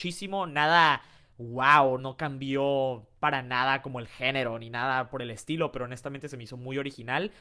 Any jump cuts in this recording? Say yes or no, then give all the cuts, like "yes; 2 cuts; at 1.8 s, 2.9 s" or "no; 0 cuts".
yes; 1 cut; at 2.0 s